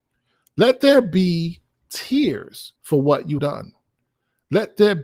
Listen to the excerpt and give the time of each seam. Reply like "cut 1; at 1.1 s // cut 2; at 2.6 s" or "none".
cut 1; at 2.8 s // cut 2; at 3.4 s